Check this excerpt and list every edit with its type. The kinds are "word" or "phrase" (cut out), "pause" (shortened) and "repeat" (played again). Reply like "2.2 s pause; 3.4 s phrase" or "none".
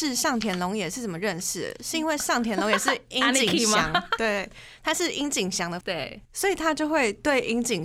5.8 s word; 6.3 s pause